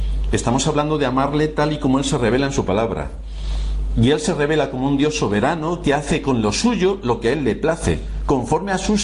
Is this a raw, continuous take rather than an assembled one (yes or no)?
yes